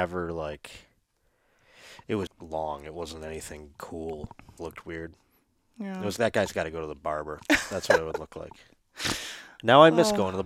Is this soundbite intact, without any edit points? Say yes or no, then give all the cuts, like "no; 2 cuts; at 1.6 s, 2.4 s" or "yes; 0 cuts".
no; 3 cuts; at 2.3 s, 4.6 s, 6.2 s